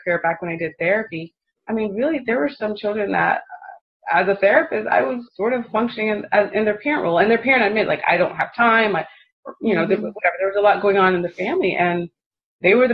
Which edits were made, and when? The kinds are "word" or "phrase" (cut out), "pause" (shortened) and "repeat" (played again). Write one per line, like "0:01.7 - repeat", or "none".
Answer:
0:05.3 - pause